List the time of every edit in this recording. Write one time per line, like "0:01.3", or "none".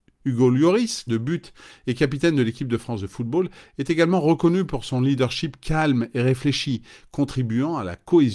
0:01.1